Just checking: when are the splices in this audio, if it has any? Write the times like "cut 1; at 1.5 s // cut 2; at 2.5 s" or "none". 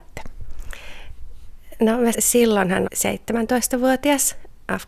cut 1; at 2.1 s // cut 2; at 2.8 s